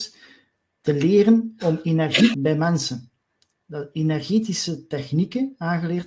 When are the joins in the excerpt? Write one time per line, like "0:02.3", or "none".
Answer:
0:02.3